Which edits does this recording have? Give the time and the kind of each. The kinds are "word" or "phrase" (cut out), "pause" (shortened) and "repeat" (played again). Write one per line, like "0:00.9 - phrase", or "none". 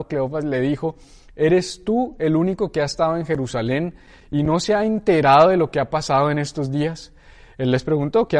none